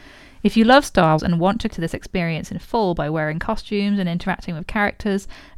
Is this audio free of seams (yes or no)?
no